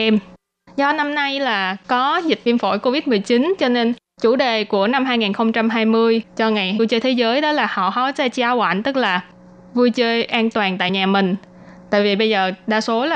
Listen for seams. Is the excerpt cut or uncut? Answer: uncut